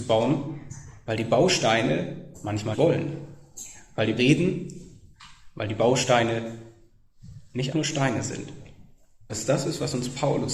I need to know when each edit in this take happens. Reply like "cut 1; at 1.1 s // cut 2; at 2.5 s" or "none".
cut 1; at 2.7 s // cut 2; at 4.2 s // cut 3; at 7.7 s // cut 4; at 9.3 s